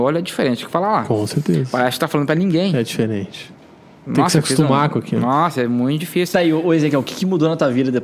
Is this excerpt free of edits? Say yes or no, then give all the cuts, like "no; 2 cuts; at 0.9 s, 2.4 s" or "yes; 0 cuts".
yes; 0 cuts